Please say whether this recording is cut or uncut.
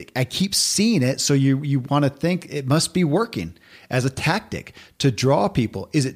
uncut